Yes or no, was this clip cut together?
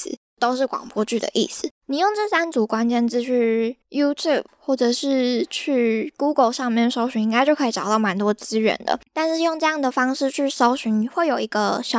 yes